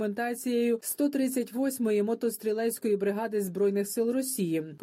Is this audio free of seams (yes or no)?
yes